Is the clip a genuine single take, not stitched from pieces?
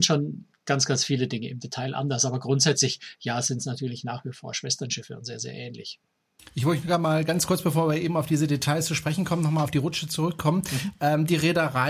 yes; 0 cuts

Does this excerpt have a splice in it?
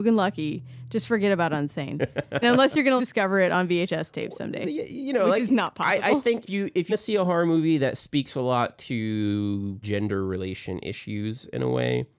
yes; 5 cuts; at 2.4 s, 3.0 s, 6.5 s, 6.9 s, 9.8 s

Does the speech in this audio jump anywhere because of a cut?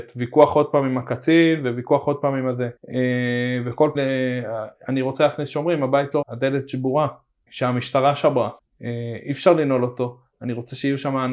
yes; 5 cuts; at 2.8 s, 3.9 s, 6.2 s, 7.5 s, 8.6 s

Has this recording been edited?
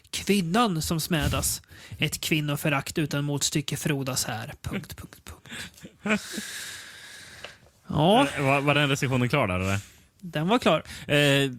no; 0 cuts

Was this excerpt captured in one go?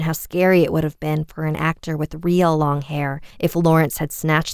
no; 1 cut; at 3.3 s

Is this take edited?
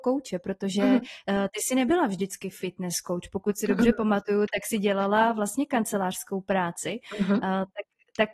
no; 0 cuts

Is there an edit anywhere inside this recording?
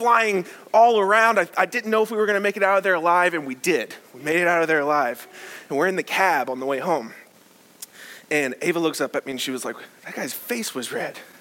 no; 0 cuts

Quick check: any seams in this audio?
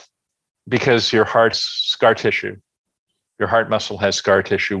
yes; 1 cut; at 1.5 s

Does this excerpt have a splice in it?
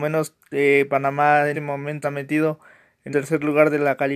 yes; 3 cuts; at 1.5 s, 2.0 s, 3.1 s

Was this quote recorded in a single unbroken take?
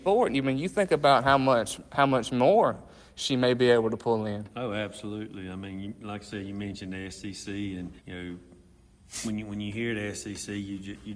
no; 1 cut; at 8.0 s

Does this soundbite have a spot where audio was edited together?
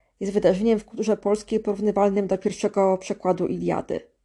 no; 0 cuts

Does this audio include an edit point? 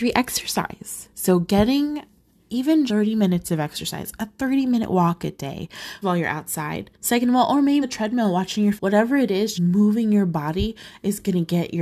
yes; 7 cuts; at 1.1 s, 2.9 s, 6.0 s, 6.9 s, 7.8 s, 8.8 s, 9.5 s

